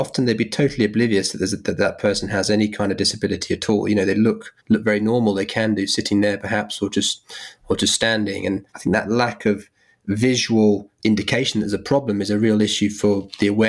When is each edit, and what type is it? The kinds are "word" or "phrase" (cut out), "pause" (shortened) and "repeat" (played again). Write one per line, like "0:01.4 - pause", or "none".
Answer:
0:04.6 - pause
0:08.7 - pause
0:11.0 - word